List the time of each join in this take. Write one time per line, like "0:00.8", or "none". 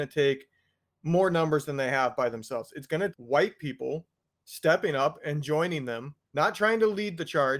0:03.1
0:06.3